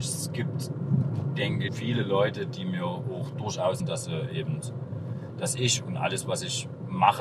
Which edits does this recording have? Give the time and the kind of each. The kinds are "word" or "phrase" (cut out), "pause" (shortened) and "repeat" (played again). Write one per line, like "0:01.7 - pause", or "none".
0:01.7 - word
0:03.8 - word